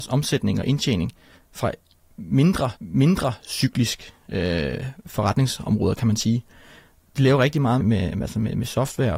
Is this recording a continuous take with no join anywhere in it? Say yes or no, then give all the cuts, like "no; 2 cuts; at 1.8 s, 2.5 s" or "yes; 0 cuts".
no; 2 cuts; at 2.8 s, 7.8 s